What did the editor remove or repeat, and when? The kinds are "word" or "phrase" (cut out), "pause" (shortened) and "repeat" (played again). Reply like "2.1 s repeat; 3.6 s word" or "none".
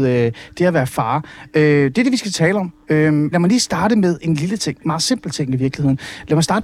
3.3 s word

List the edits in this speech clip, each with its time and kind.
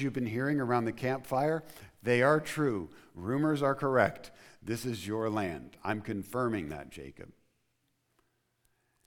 none

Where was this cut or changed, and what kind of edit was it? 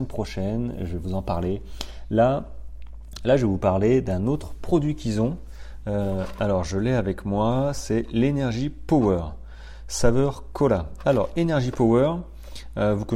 none

